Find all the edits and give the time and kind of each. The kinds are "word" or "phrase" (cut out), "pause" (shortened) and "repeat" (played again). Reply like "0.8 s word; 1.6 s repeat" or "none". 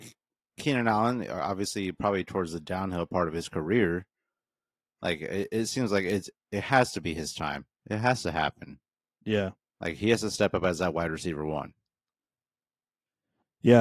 9.0 s pause